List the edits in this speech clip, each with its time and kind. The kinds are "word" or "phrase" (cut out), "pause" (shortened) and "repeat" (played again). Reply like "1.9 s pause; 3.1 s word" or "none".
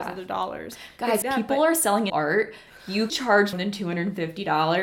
1.2 s word; 2.1 s word; 3.1 s word; 3.5 s word